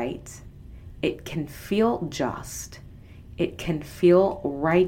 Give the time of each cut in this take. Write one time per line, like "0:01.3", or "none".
none

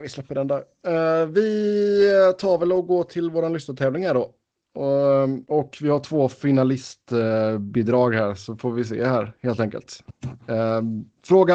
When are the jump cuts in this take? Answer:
0:05.5

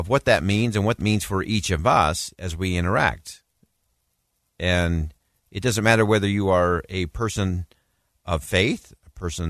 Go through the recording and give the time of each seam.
0:01.0

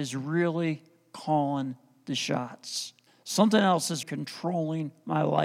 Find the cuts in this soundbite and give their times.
0:03.1
0:04.0

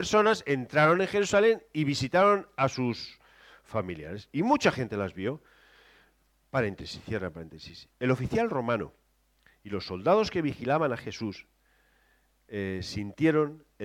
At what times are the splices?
none

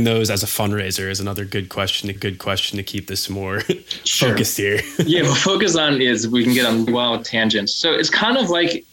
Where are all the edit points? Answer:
0:02.2
0:06.9

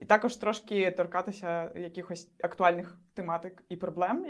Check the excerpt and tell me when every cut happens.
none

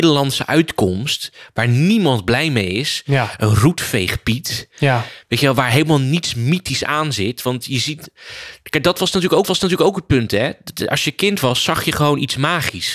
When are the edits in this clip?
0:09.4

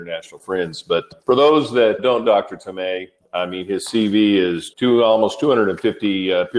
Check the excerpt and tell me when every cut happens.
0:01.2
0:02.2
0:03.2
0:04.7

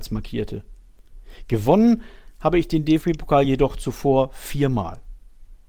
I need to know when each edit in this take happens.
none

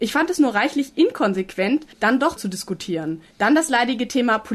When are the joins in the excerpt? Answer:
0:01.9
0:02.4
0:03.3

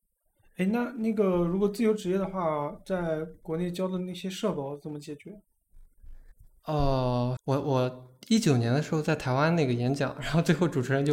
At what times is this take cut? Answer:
0:07.4

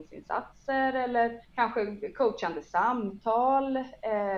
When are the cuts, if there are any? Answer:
0:01.4

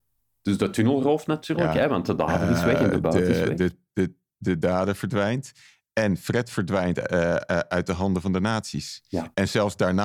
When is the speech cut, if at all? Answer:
none

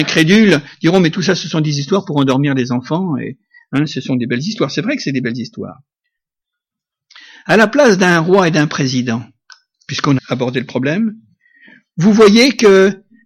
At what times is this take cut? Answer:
0:10.2

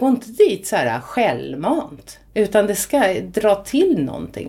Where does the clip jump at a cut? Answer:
0:02.3

